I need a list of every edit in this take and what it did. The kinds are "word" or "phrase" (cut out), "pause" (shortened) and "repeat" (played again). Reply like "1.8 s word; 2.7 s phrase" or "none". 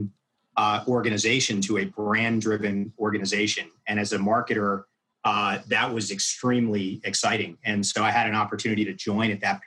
none